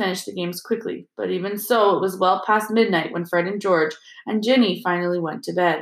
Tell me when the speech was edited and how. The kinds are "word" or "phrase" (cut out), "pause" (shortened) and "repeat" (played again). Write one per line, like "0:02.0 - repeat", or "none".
none